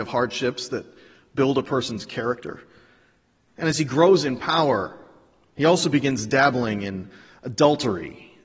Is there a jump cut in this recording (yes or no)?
no